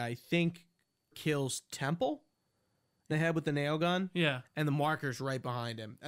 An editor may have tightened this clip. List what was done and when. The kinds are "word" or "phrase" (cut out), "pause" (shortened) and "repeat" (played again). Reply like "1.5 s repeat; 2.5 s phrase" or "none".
1.1 s word; 3.1 s phrase